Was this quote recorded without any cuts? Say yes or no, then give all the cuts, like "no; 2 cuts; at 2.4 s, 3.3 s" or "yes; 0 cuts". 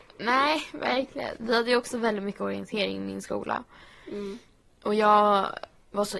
yes; 0 cuts